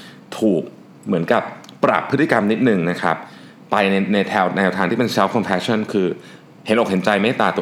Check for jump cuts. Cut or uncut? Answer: uncut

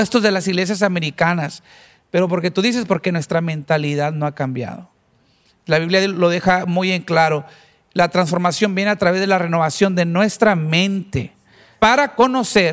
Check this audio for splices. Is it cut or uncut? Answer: uncut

